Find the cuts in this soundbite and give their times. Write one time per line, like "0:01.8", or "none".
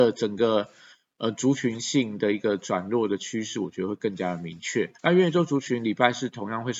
0:05.0